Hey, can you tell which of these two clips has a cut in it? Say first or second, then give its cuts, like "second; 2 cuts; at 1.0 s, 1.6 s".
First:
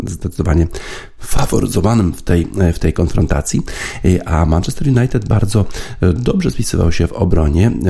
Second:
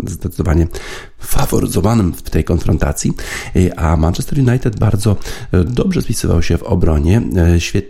second; 1 cut; at 2.2 s